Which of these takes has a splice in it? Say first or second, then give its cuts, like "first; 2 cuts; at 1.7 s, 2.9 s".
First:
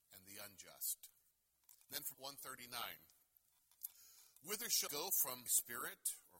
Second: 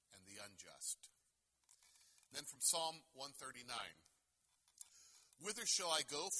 first; 4 cuts; at 1.8 s, 2.1 s, 4.9 s, 5.5 s